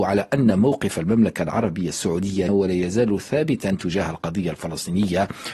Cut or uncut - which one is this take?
cut